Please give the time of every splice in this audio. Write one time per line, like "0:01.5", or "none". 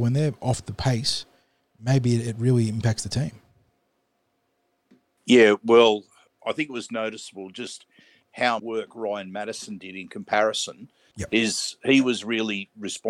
0:08.6